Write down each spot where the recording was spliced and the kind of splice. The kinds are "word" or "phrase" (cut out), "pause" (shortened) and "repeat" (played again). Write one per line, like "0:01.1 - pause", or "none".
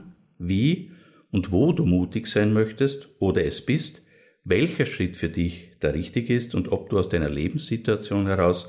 none